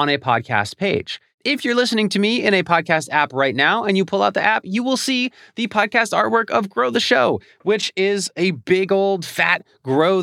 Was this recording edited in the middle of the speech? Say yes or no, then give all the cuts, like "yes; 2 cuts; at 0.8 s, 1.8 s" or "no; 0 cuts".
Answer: no; 0 cuts